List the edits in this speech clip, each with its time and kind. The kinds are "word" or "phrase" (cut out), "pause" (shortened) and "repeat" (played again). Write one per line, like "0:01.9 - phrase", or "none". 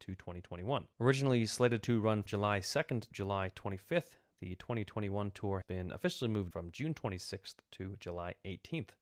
0:00.9 - pause
0:02.3 - word
0:03.1 - word
0:05.6 - word
0:06.5 - phrase

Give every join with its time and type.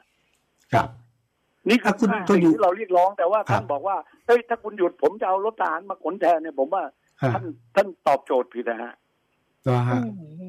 none

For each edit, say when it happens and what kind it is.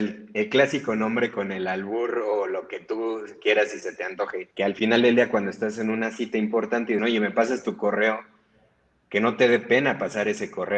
0:04.5 - pause
0:07.0 - phrase

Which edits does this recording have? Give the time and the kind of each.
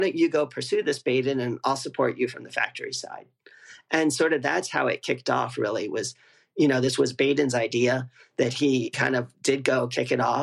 none

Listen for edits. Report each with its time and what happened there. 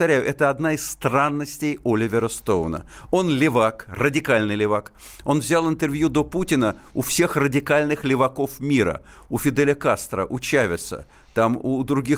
none

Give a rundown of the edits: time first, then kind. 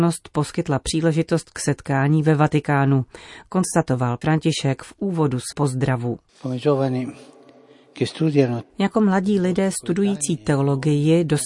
0:04.2 - word
0:05.5 - word
0:08.6 - word

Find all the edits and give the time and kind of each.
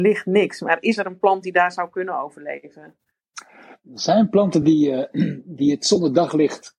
none

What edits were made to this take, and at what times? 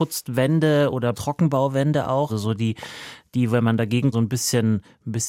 0:01.1 - word
0:02.3 - word
0:04.1 - phrase

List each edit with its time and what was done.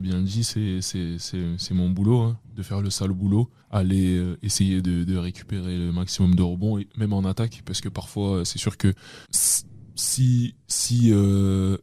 0:02.4 - pause
0:03.6 - pause
0:09.2 - pause

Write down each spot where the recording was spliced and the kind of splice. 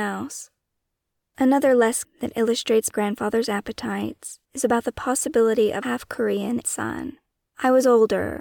0:02.0 - phrase
0:02.9 - word
0:04.5 - pause
0:05.8 - word
0:06.6 - word

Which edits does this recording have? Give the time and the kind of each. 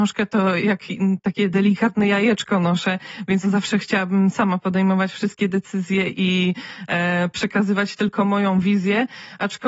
0:03.4 - word

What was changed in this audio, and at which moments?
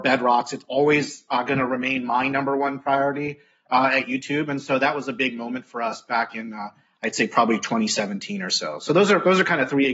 none

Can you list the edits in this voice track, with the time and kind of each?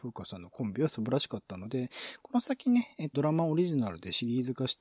0:03.1 - word

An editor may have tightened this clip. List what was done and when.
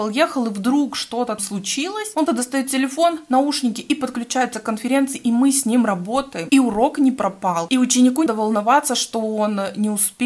0:01.4 - word
0:02.3 - word
0:08.3 - word

